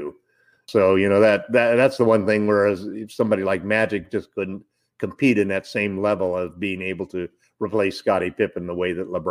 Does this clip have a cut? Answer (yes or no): no